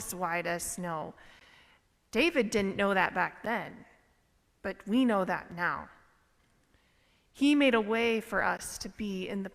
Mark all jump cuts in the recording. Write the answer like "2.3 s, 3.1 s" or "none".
none